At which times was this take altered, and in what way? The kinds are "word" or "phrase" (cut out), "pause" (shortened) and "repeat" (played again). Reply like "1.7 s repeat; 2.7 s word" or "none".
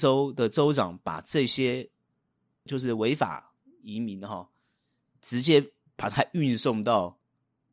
none